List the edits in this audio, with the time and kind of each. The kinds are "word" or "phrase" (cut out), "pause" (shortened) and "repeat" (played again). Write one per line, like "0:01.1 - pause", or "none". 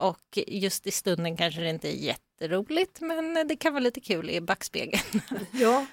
none